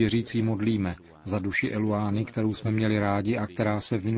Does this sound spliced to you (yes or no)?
no